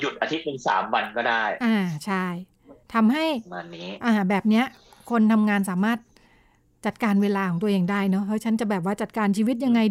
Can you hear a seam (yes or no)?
yes